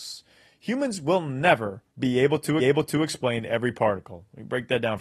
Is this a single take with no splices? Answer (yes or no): no